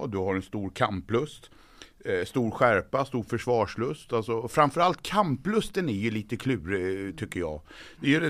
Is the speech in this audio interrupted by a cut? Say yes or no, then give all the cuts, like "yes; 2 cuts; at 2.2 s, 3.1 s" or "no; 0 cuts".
no; 0 cuts